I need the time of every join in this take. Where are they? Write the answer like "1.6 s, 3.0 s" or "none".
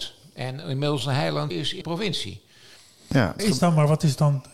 1.0 s, 1.5 s, 1.8 s, 3.4 s